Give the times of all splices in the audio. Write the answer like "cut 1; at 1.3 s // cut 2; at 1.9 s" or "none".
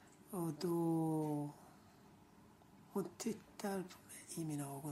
none

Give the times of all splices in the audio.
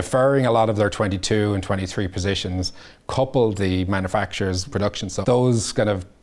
cut 1; at 3.6 s // cut 2; at 4.7 s // cut 3; at 5.2 s

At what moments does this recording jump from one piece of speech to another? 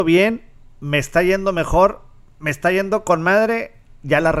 none

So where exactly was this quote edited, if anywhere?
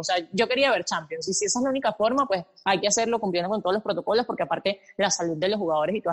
none

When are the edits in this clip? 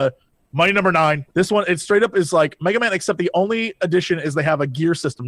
cut 1; at 1.3 s

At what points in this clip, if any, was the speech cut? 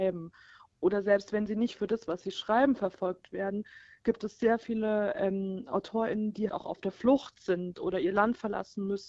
cut 1; at 6.5 s

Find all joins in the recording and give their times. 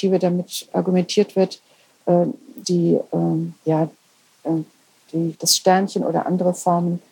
cut 1; at 2.6 s // cut 2; at 3.6 s // cut 3; at 5.3 s

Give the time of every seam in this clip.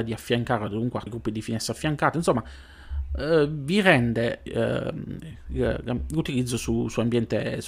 cut 1; at 1.1 s // cut 2; at 4.5 s

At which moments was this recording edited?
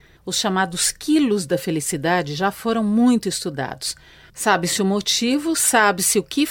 none

